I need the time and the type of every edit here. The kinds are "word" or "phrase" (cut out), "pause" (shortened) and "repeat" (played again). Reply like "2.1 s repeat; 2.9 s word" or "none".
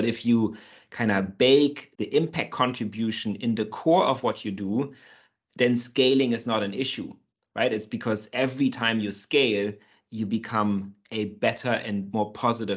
2.0 s word